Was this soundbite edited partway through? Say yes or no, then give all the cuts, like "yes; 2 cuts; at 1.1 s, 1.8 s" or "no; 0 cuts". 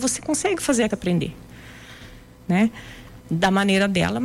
yes; 1 cut; at 0.9 s